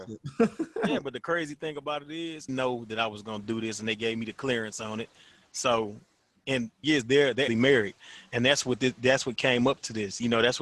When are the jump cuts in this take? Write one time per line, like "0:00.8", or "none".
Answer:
0:02.5
0:06.8
0:07.5